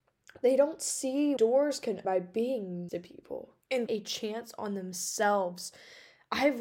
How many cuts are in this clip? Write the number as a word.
four